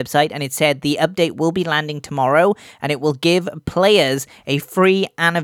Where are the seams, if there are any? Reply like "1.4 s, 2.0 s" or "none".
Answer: none